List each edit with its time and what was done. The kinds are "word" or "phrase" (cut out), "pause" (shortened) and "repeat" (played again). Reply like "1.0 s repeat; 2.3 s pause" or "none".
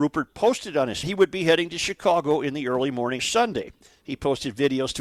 1.0 s phrase; 3.2 s word